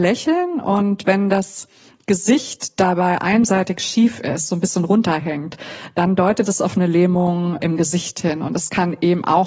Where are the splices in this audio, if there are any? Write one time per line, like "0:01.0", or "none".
0:07.6